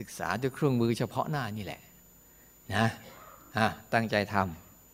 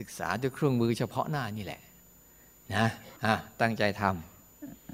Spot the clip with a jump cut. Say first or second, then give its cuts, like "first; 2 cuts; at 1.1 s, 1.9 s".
second; 1 cut; at 3.2 s